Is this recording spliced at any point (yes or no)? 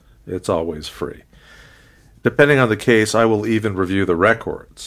no